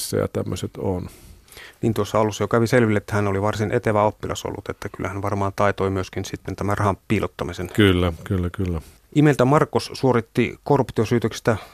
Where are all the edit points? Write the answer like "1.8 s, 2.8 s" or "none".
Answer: 7.0 s, 9.0 s